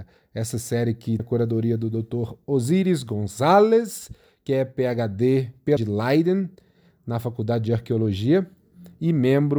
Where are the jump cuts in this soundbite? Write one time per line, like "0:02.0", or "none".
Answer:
0:01.2
0:05.8